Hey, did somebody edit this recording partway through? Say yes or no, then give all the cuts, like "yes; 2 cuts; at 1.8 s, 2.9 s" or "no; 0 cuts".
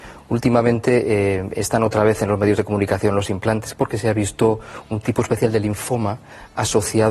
no; 0 cuts